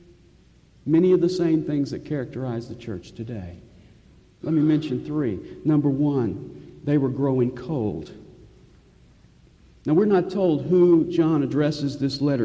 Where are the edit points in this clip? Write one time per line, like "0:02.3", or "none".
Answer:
none